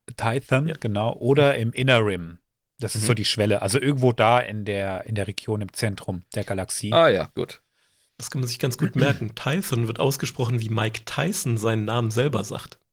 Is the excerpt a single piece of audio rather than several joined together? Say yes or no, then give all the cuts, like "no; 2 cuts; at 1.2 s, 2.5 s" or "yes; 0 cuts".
yes; 0 cuts